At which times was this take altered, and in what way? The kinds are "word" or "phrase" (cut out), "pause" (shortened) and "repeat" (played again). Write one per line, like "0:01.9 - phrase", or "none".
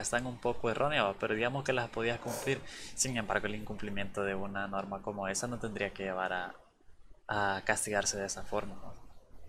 none